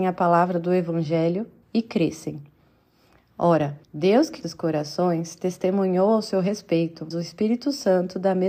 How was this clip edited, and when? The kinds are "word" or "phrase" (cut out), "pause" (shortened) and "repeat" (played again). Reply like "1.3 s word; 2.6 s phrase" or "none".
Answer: 1.6 s pause; 3.8 s pause; 4.4 s word; 7.1 s word